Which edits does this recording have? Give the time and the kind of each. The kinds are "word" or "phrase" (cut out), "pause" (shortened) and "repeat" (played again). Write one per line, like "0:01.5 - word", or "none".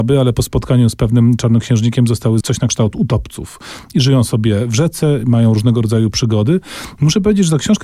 0:02.4 - phrase